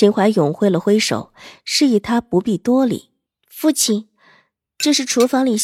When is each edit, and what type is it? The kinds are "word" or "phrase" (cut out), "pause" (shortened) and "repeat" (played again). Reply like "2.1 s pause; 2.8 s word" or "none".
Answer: 3.3 s pause